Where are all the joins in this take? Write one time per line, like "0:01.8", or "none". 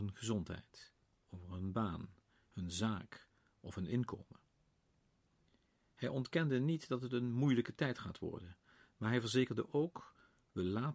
none

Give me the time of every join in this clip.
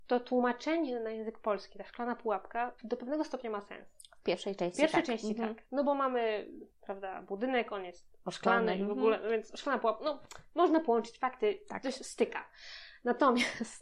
0:02.8
0:04.0
0:06.7

